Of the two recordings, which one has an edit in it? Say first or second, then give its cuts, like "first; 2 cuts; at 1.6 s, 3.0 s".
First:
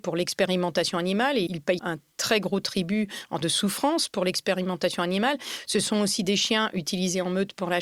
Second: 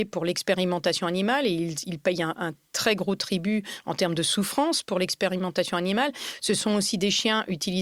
first; 3 cuts; at 1.5 s, 1.8 s, 3.4 s